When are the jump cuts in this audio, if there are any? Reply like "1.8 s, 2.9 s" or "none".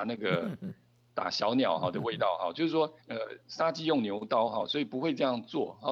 3.0 s